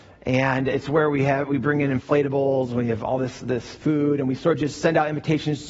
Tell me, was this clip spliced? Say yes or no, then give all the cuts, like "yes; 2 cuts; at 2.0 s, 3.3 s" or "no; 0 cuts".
no; 0 cuts